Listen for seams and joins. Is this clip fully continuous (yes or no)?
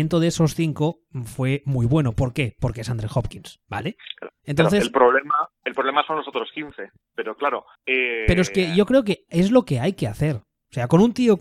no